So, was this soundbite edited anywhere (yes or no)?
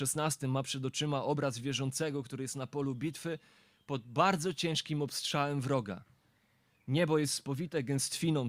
no